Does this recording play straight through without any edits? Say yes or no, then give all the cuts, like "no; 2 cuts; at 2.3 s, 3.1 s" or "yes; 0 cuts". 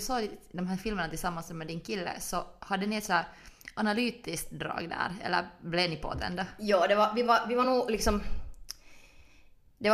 yes; 0 cuts